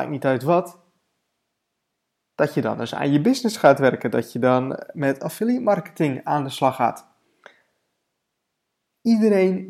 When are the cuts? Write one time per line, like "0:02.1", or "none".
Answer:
none

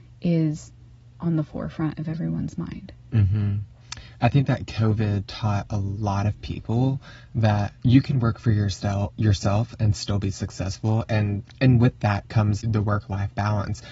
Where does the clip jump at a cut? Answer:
0:07.8
0:12.6

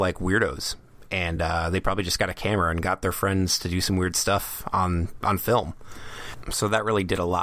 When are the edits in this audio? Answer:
none

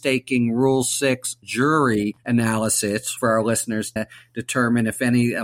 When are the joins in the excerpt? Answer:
0:01.4
0:03.2
0:04.0

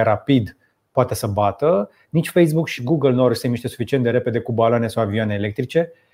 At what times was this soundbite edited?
0:02.8

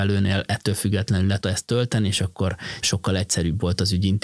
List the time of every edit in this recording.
0:01.4
0:02.8

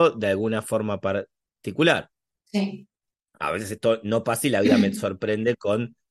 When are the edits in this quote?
none

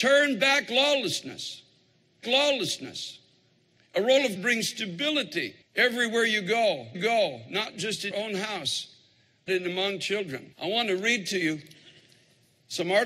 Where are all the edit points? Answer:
0:02.2
0:04.4
0:05.6
0:06.9
0:08.1
0:09.5
0:10.5

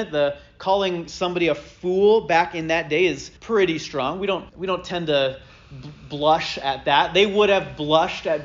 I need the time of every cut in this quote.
0:03.4
0:04.5

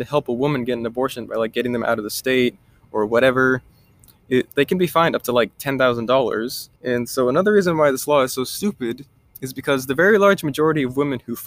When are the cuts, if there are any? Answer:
0:06.8

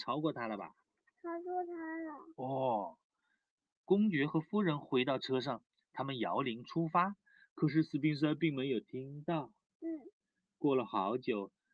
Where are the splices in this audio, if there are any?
none

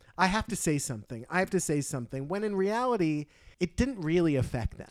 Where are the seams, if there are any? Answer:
0:03.5

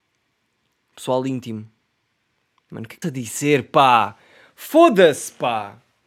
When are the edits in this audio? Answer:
0:03.0

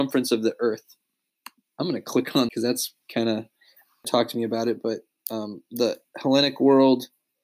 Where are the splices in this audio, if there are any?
0:02.5
0:04.0

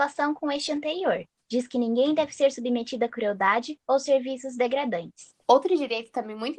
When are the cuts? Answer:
0:05.4

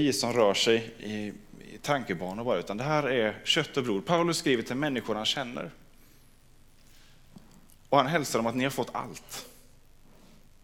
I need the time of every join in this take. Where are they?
none

